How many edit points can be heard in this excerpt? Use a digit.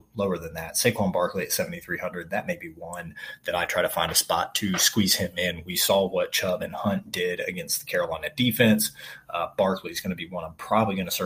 0